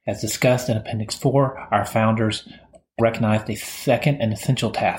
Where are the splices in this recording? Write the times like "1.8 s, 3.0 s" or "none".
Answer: 3.0 s